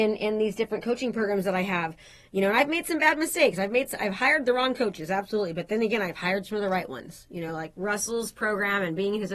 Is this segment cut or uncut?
uncut